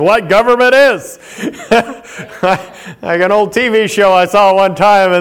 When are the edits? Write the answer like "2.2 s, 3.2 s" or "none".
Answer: none

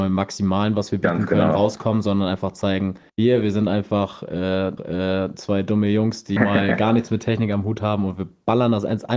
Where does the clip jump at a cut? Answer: 3.1 s, 4.8 s, 6.4 s

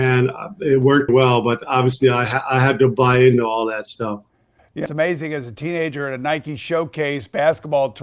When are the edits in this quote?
1.1 s, 4.9 s

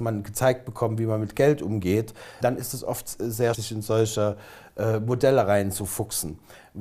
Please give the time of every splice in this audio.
2.4 s, 3.5 s

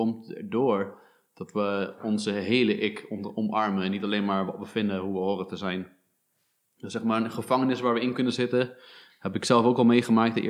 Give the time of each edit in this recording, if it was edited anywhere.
none

